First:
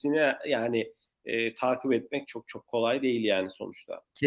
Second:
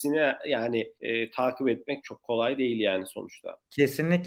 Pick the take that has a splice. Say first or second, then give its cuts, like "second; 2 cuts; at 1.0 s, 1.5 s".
second; 2 cuts; at 1.0 s, 2.0 s